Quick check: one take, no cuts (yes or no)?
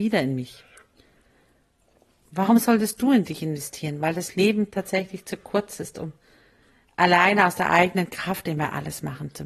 yes